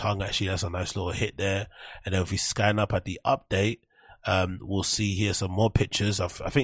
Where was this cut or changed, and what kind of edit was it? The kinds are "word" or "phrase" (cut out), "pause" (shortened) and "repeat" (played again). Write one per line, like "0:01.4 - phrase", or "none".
none